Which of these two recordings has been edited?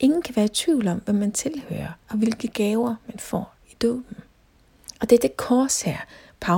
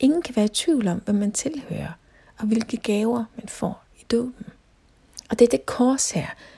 first; 1 cut; at 2.0 s

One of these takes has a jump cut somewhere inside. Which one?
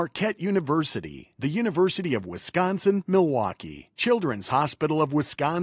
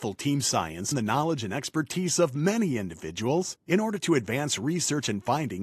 second; 1 cut; at 0.9 s

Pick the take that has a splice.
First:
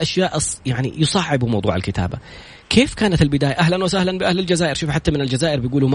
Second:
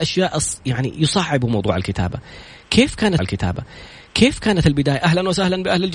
second; 1 cut; at 3.2 s

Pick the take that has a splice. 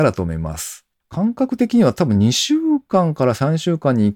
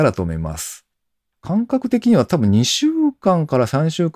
first; 1 cut; at 1.0 s

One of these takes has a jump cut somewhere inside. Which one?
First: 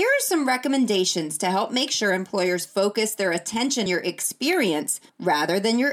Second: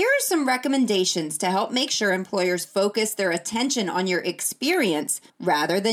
first; 1 cut; at 3.9 s

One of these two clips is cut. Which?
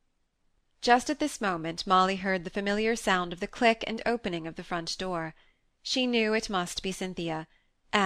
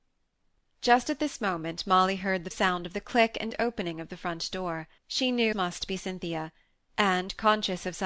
second; 3 cuts; at 2.5 s, 5.0 s, 5.5 s

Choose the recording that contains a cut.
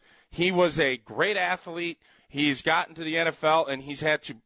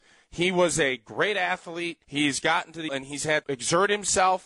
second; 3 cuts; at 2.0 s, 2.9 s, 3.4 s

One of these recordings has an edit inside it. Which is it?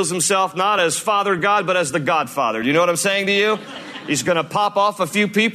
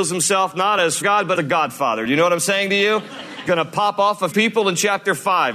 second; 4 cuts; at 1.0 s, 1.3 s, 3.5 s, 4.3 s

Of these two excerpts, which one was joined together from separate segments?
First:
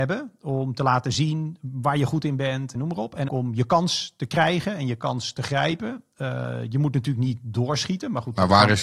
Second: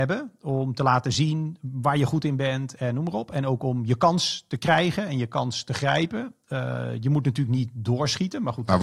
first; 2 cuts; at 2.7 s, 3.3 s

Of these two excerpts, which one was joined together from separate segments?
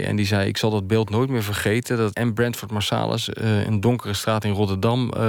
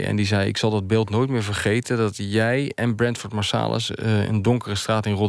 first; 1 cut; at 2.1 s

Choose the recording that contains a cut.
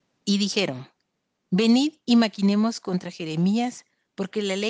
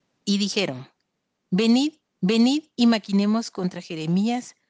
second; 1 cut; at 2.0 s

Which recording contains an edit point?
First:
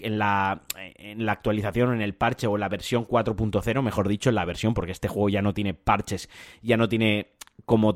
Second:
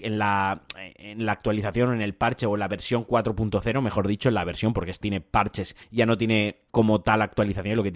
second; 3 cuts; at 5.0 s, 5.8 s, 6.7 s

